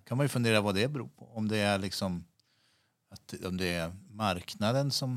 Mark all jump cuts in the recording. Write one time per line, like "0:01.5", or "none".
none